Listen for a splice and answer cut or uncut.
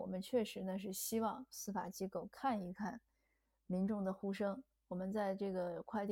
uncut